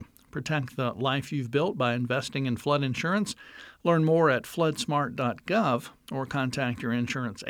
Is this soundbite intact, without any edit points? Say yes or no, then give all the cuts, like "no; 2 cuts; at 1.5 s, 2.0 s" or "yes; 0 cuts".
yes; 0 cuts